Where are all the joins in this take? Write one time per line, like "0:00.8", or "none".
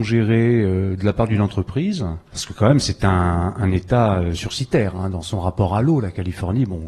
0:02.3

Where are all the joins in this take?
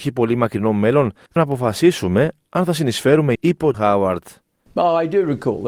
0:01.4
0:03.4
0:03.7

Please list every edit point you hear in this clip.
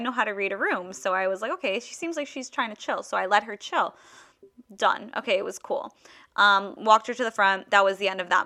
0:04.6

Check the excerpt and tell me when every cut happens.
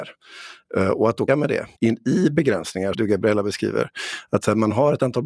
0:01.3
0:01.7
0:02.9

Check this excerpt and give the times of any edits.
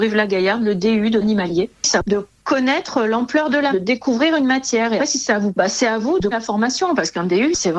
0:01.2
0:02.0
0:03.7
0:05.0
0:05.5
0:06.3

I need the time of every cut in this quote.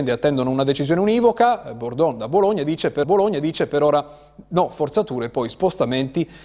0:03.0

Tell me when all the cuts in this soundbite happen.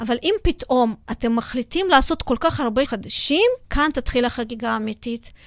0:02.8
0:03.6

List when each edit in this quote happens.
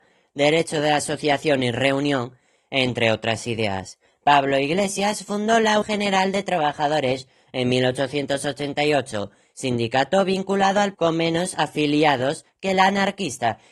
0:05.8
0:10.9

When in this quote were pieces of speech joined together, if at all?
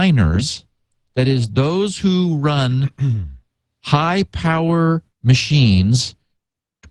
0:05.1

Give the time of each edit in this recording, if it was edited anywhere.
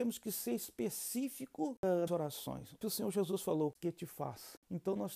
0:02.1
0:02.8
0:03.8

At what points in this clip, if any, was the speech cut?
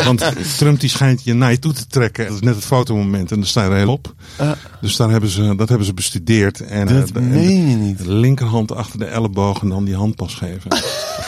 0:02.3
0:03.9
0:06.9

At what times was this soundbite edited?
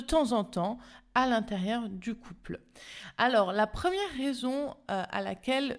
none

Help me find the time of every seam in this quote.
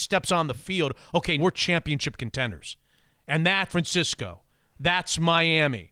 0:01.4
0:03.7

